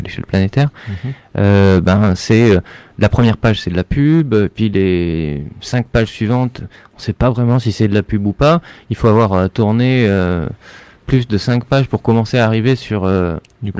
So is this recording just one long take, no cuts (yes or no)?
yes